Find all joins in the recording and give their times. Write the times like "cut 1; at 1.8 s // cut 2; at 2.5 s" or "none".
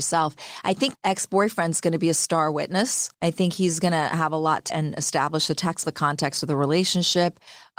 cut 1; at 0.9 s // cut 2; at 3.1 s // cut 3; at 4.7 s // cut 4; at 5.8 s